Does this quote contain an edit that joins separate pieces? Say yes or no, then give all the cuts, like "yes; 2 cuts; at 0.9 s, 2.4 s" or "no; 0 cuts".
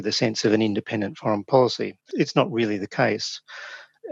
no; 0 cuts